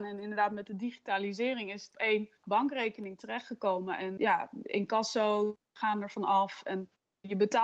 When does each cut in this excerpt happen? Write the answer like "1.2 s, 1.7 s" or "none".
1.9 s, 2.4 s, 4.2 s, 5.7 s